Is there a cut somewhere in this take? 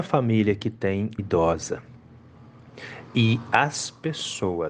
yes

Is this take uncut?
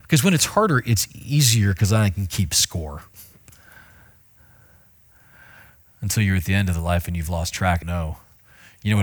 no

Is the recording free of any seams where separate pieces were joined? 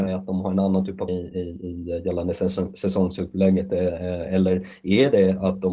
no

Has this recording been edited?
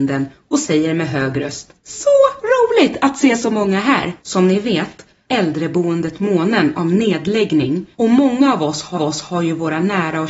yes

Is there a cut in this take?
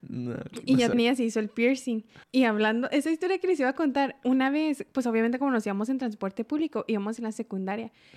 yes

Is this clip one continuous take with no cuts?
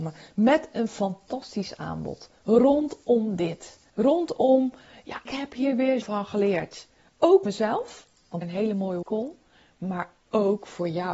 no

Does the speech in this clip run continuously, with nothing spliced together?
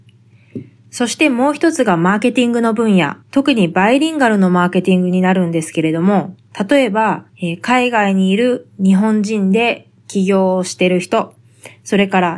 no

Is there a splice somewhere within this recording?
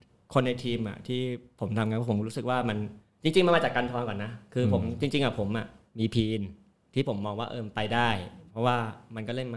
no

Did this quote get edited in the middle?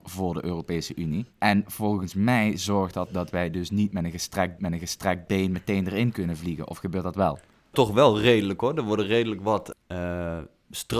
yes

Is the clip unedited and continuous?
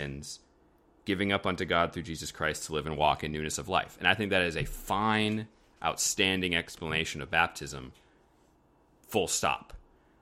yes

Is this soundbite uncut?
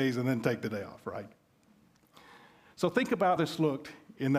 no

